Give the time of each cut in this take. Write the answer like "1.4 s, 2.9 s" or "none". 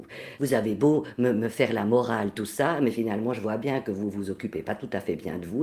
none